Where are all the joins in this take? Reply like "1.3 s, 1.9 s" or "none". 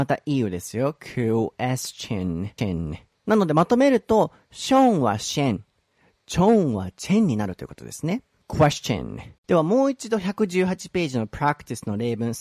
2.6 s, 9.4 s